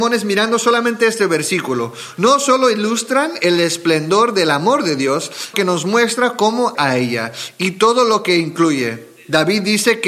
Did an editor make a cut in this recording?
yes; 2 cuts; at 5.5 s, 6.7 s

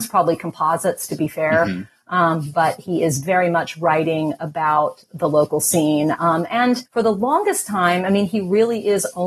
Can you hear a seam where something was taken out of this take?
yes; 1 cut; at 6.9 s

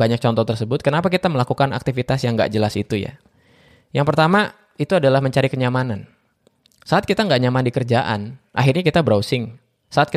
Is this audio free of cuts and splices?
yes; 0 cuts

